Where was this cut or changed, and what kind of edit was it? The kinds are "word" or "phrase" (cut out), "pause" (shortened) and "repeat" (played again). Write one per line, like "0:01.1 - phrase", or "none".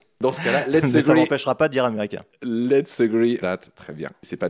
0:03.4 - word